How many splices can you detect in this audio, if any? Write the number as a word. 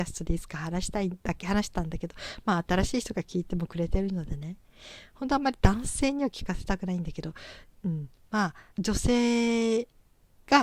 two